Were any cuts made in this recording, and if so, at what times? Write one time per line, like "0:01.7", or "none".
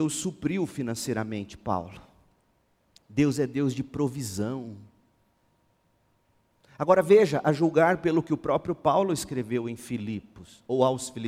none

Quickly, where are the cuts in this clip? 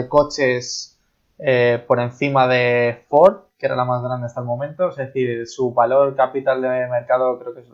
none

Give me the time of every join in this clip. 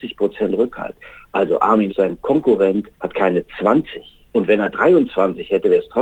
0:01.9
0:02.9
0:04.3

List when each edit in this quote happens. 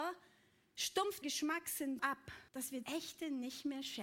0:01.2
0:02.0
0:02.5
0:02.8

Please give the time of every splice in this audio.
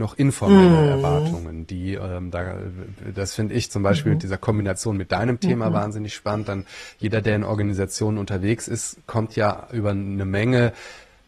none

